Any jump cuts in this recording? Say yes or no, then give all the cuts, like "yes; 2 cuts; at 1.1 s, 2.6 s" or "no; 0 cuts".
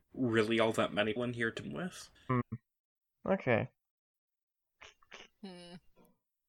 yes; 3 cuts; at 1.2 s, 1.6 s, 2.2 s